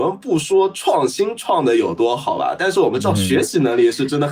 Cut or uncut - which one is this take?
uncut